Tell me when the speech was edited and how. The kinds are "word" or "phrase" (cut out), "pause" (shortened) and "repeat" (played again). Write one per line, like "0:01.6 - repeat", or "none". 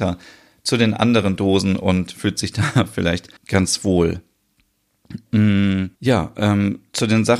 0:03.4 - pause
0:05.9 - pause